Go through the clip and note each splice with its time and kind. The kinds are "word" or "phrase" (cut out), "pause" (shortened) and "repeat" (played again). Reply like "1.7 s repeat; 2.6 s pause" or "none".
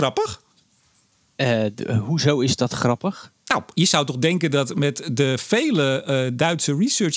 3.4 s pause